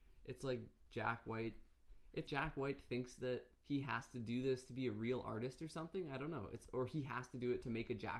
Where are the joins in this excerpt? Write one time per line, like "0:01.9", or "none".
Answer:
0:02.3
0:03.5